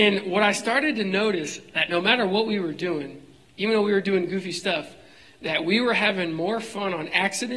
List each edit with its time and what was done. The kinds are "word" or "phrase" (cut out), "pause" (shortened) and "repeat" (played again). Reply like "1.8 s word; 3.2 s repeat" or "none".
none